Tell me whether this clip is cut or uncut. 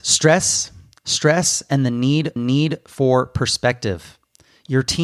cut